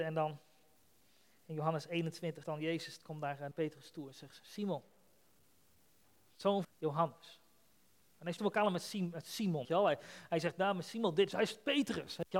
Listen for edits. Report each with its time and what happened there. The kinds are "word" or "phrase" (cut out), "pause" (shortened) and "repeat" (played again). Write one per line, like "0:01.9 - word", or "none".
0:02.4 - word
0:03.5 - word
0:06.6 - word
0:08.4 - word
0:09.6 - word